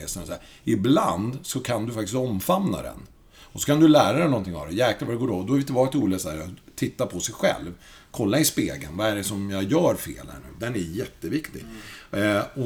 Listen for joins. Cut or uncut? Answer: uncut